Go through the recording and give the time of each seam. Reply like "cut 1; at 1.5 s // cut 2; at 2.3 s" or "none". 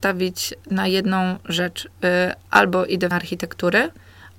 cut 1; at 3.1 s